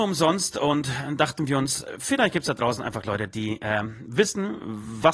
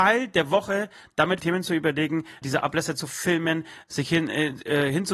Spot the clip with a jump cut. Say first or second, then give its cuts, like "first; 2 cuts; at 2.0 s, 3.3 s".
second; 3 cuts; at 1.4 s, 2.4 s, 3.9 s